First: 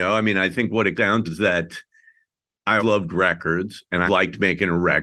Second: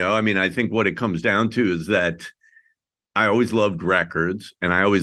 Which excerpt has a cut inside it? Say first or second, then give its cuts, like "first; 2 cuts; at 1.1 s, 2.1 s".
first; 4 cuts; at 1.0 s, 1.3 s, 2.8 s, 4.1 s